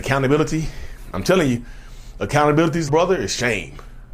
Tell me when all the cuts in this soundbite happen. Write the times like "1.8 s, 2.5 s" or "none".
2.9 s